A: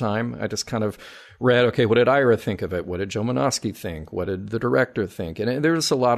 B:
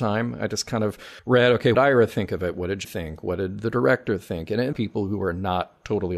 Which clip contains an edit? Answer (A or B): B